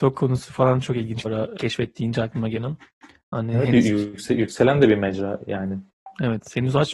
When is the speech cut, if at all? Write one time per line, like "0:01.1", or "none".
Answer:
0:01.2
0:01.6
0:02.9